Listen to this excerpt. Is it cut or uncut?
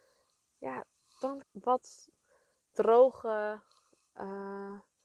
cut